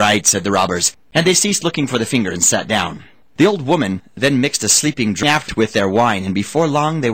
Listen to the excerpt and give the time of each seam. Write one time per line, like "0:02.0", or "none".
0:03.2

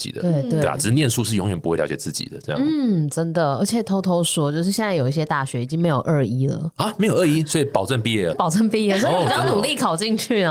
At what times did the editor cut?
0:08.3

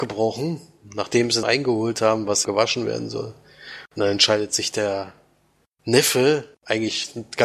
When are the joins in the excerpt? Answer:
0:01.4
0:02.4
0:06.5

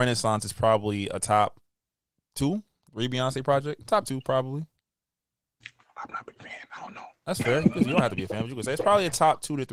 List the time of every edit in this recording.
none

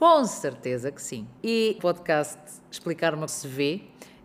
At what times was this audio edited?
0:01.4
0:01.8
0:03.3

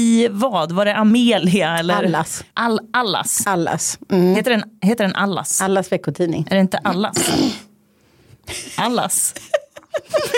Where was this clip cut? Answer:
0:02.5

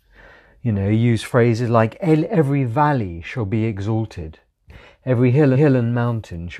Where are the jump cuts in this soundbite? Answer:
0:05.5

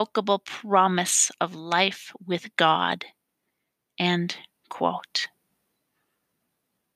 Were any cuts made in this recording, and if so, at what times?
none

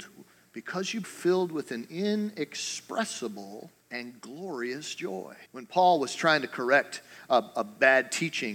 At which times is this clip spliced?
0:01.0
0:03.8
0:05.5

